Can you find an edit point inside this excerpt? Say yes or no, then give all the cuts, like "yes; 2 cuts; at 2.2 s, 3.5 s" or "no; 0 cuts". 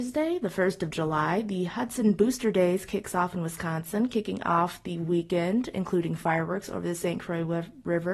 no; 0 cuts